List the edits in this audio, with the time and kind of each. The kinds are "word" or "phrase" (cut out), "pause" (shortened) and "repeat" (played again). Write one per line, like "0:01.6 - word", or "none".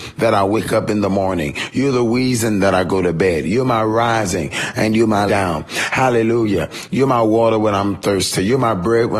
0:05.3 - word